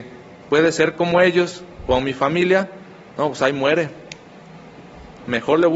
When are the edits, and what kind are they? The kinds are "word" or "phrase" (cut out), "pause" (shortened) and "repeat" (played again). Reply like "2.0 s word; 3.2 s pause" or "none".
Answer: none